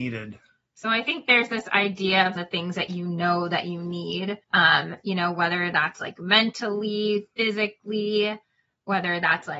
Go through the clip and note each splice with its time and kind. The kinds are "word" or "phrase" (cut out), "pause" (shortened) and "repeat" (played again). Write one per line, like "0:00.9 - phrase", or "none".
0:02.4 - phrase
0:04.4 - pause